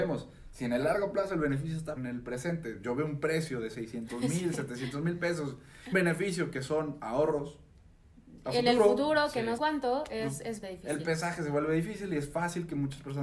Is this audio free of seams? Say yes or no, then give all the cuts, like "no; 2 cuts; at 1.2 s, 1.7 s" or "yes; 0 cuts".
no; 4 cuts; at 2.0 s, 5.9 s, 9.6 s, 10.6 s